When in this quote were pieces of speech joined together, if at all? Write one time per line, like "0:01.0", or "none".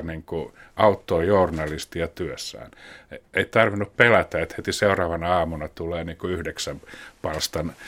none